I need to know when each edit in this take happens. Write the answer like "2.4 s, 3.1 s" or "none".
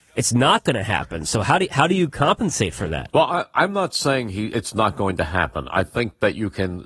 none